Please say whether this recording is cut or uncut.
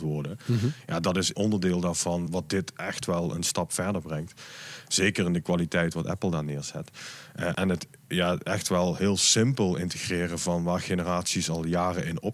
cut